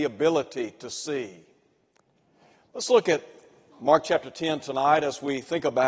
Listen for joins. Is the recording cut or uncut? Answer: uncut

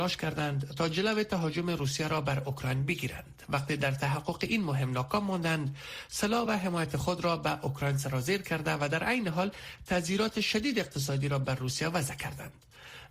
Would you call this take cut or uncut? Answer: uncut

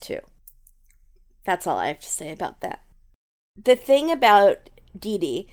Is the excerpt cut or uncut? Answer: cut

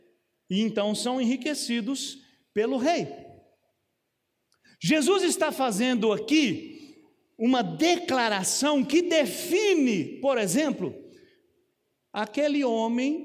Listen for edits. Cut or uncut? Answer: uncut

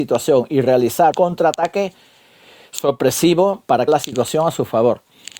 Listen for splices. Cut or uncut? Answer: cut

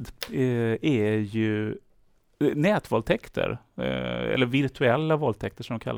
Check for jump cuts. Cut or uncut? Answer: uncut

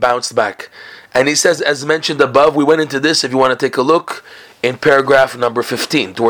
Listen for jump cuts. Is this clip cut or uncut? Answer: cut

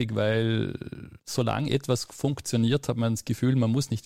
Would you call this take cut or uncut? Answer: cut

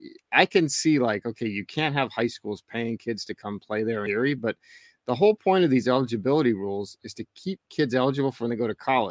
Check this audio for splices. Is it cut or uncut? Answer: uncut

